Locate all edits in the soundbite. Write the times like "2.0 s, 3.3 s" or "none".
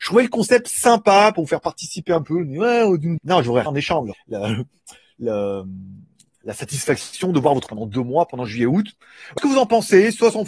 2.2 s, 3.2 s, 3.7 s, 4.1 s, 7.7 s, 9.4 s